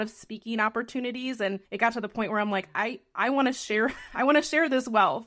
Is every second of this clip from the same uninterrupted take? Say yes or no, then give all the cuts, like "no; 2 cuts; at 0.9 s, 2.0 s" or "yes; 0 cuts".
no; 1 cut; at 1.7 s